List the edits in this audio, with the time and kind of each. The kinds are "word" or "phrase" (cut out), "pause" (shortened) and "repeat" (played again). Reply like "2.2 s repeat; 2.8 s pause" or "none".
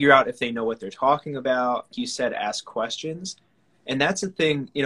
1.9 s word